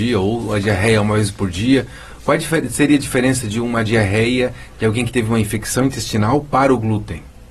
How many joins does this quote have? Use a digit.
0